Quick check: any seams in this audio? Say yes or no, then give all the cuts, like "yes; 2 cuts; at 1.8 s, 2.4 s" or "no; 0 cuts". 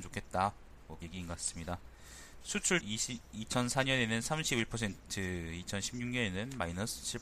yes; 2 cuts; at 1.0 s, 2.8 s